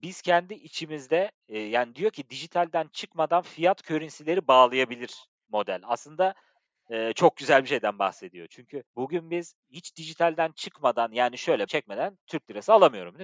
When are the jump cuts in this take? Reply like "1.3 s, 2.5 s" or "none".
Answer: 8.9 s, 9.6 s, 11.7 s